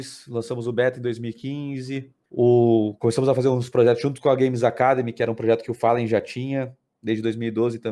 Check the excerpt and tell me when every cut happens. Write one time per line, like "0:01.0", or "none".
0:02.2